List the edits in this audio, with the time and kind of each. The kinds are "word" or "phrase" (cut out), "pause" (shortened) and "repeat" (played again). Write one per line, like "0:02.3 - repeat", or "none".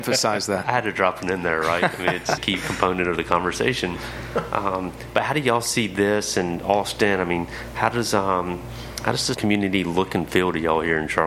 0:02.4 - phrase
0:09.3 - word